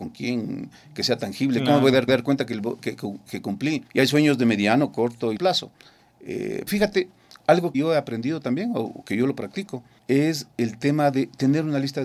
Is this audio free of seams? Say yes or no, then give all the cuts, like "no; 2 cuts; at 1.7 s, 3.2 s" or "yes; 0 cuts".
no; 7 cuts; at 2.1 s, 2.8 s, 3.9 s, 5.4 s, 6.7 s, 7.7 s, 10.0 s